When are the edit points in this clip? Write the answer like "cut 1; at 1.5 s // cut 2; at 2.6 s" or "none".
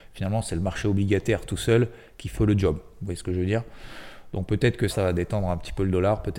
cut 1; at 2.3 s // cut 2; at 4.9 s